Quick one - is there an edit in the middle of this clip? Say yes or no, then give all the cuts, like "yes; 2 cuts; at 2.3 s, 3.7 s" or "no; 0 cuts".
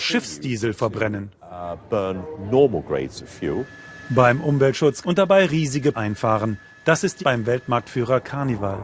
yes; 3 cuts; at 5.0 s, 5.9 s, 7.2 s